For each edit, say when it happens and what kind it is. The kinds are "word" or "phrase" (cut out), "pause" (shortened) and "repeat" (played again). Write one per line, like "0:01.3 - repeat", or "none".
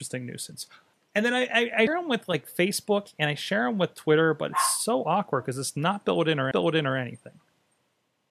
0:00.9 - pause
0:01.9 - word
0:06.5 - repeat